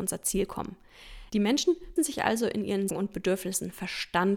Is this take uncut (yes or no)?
no